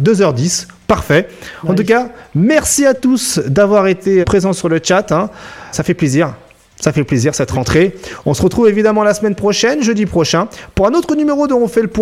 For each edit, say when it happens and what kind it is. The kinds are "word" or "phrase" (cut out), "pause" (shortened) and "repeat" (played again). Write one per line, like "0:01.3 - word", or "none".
0:04.2 - word
0:05.7 - word